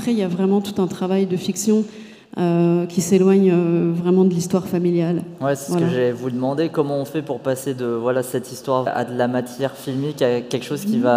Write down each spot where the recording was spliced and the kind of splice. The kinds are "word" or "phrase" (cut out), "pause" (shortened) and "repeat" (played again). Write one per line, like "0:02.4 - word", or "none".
0:08.9 - word